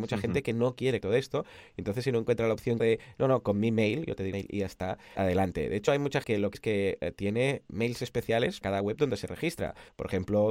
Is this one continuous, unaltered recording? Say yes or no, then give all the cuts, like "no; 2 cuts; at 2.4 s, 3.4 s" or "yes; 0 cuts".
no; 6 cuts; at 1.0 s, 2.8 s, 5.2 s, 6.2 s, 6.5 s, 8.6 s